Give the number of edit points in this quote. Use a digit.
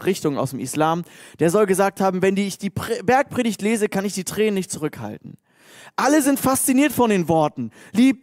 0